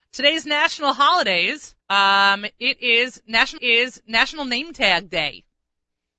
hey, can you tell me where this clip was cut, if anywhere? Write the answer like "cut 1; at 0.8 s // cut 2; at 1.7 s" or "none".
cut 1; at 1.8 s // cut 2; at 3.6 s